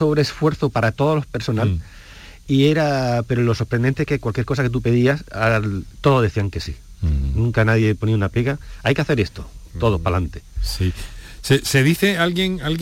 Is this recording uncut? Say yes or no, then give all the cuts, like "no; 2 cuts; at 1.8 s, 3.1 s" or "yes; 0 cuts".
yes; 0 cuts